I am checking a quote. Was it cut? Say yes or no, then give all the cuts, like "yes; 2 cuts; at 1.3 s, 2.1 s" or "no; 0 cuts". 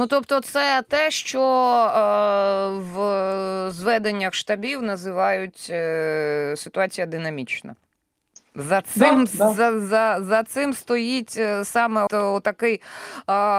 yes; 1 cut; at 12.1 s